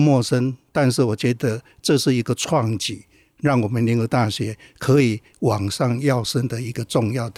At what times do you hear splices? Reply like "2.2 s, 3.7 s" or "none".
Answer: none

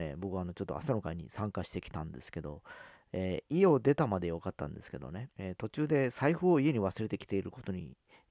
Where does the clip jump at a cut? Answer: 5.3 s

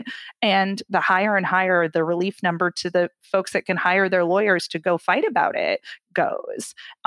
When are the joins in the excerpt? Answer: none

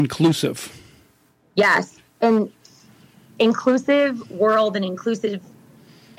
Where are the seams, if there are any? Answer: none

